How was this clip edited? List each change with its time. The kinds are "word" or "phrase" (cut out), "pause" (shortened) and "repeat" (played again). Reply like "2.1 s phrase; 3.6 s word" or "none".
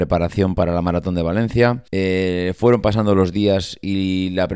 1.9 s pause